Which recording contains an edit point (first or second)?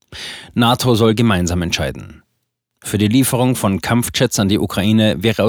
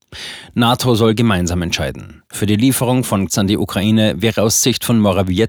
second